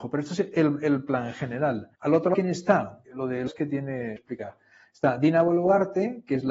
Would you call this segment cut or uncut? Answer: cut